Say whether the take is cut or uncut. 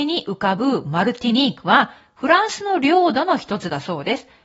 uncut